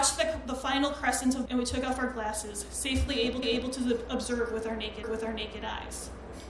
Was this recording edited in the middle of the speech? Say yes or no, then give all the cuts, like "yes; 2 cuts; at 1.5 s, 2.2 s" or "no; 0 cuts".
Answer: yes; 3 cuts; at 1.5 s, 3.4 s, 5.0 s